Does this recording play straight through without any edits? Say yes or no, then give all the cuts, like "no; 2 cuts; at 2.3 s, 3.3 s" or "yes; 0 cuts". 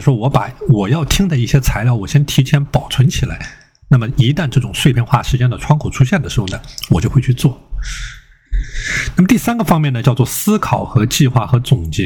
yes; 0 cuts